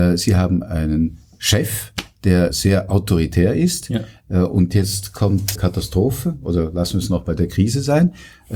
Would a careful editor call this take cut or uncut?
cut